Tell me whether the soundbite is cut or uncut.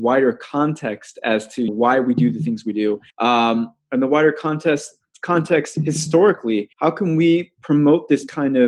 cut